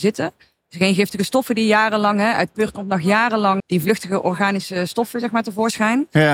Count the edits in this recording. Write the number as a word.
one